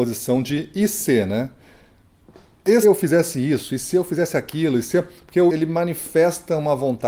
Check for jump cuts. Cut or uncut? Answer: cut